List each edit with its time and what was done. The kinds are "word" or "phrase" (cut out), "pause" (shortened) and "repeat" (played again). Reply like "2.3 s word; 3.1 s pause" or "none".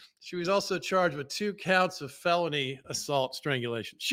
none